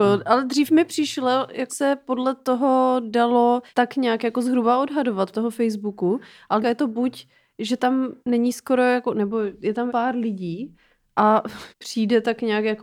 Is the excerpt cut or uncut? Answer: cut